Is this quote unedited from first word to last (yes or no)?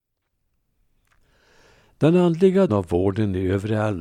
no